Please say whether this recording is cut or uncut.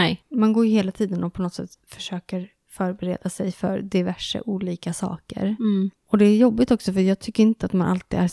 cut